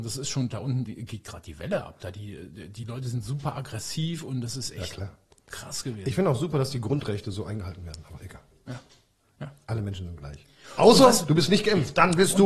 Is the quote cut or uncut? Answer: uncut